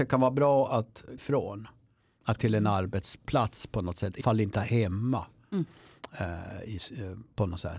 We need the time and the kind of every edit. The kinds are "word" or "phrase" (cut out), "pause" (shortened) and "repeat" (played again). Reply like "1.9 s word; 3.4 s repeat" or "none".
1.2 s word; 2.4 s word; 4.2 s word; 4.5 s word